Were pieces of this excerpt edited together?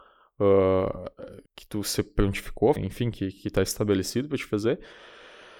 yes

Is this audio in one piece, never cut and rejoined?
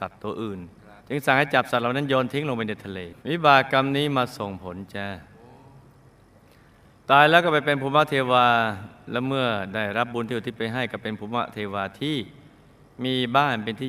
no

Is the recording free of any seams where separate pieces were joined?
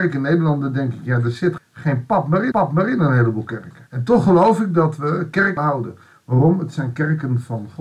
no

